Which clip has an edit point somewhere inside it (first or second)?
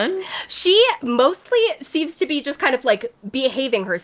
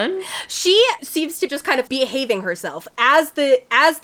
second